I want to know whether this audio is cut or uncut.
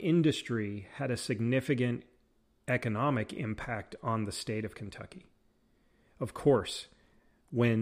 uncut